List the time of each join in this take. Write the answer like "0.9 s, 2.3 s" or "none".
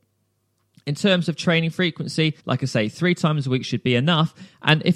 2.4 s

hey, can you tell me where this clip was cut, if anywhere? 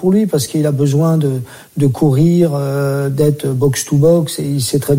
none

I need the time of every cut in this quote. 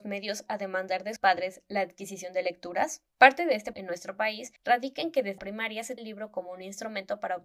1.2 s, 3.1 s, 3.7 s, 4.6 s, 5.4 s, 6.0 s

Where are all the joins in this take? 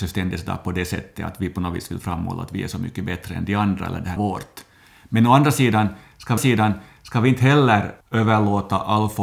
4.2 s, 6.4 s, 8.0 s

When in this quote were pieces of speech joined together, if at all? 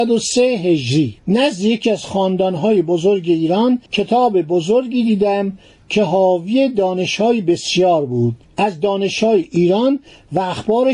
1.2 s, 3.9 s, 8.4 s

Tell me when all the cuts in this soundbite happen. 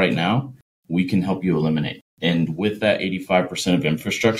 2.1 s

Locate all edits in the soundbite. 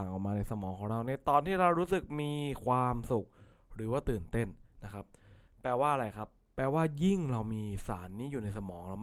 none

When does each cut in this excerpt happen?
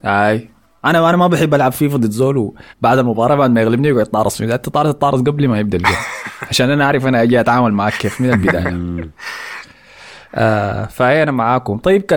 2.7 s, 10.3 s

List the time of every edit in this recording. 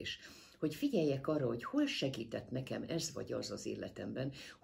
none

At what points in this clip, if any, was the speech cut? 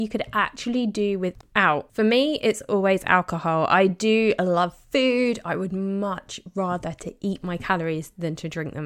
none

